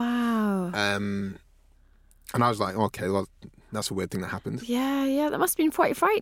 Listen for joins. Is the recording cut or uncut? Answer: uncut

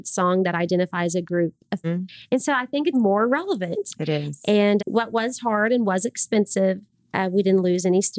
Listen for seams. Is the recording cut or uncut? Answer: cut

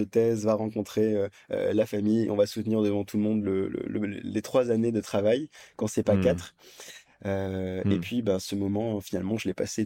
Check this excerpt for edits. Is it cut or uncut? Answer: uncut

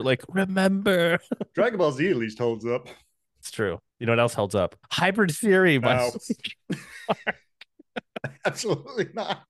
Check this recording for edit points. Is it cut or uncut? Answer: cut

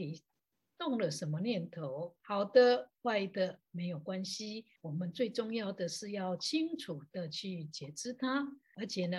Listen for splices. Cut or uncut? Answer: cut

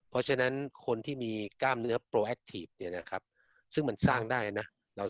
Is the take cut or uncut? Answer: uncut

